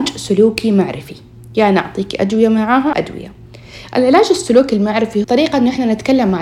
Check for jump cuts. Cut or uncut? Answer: cut